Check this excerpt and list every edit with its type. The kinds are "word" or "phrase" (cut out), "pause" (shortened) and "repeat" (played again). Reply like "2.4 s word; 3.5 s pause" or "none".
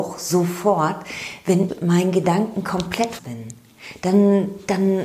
1.7 s word; 3.2 s word

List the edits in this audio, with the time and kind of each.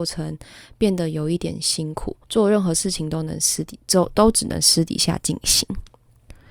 2.2 s pause

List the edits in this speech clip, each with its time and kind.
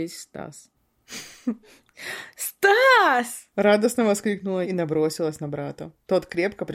3.5 s pause; 4.6 s word

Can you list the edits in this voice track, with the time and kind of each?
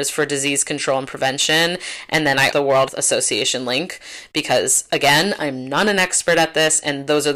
2.5 s phrase; 2.9 s word

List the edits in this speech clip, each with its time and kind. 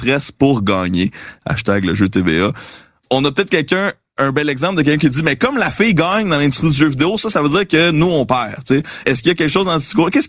none

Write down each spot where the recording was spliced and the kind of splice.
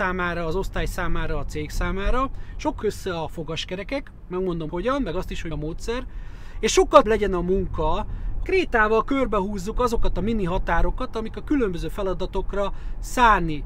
2.8 s phrase; 4.7 s word; 5.5 s word; 7.0 s word; 8.4 s word

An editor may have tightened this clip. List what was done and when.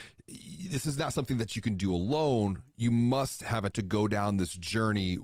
3.7 s word

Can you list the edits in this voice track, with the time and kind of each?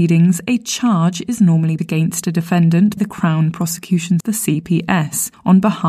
1.8 s word; 3.0 s word; 4.2 s word

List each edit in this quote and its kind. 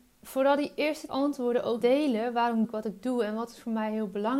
1.1 s word; 1.8 s word; 2.6 s word

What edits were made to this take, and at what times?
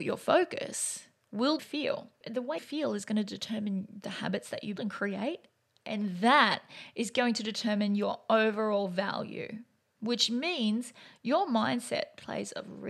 1.6 s phrase; 2.6 s word; 4.8 s word

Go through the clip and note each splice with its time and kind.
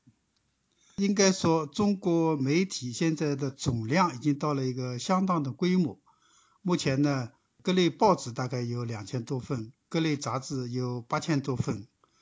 none

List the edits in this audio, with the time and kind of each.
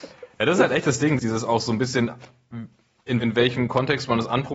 1.2 s word; 3.2 s word

